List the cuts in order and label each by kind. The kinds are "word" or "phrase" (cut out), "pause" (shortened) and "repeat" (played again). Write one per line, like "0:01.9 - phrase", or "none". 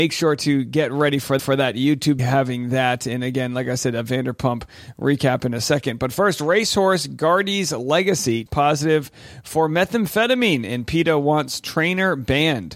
0:01.4 - repeat
0:02.2 - phrase
0:08.5 - word